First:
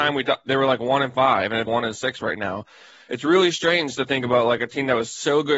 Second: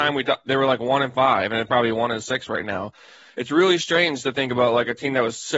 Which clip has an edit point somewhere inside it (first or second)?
first